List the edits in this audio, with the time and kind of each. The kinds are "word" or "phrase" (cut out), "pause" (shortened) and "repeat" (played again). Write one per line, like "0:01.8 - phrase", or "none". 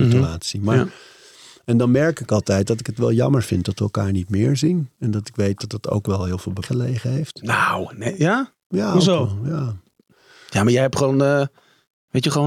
0:06.6 - word